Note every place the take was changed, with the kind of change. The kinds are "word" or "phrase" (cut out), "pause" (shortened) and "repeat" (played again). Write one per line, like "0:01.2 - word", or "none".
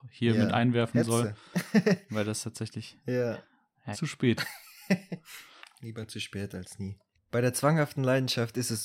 0:03.9 - phrase
0:05.6 - pause
0:07.1 - pause